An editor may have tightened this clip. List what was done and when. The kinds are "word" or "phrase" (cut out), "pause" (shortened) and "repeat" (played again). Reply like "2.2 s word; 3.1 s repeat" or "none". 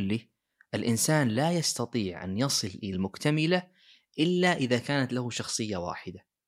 2.9 s phrase